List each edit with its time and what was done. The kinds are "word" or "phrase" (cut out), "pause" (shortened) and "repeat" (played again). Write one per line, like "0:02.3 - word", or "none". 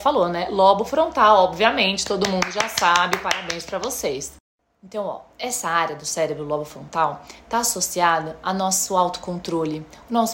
none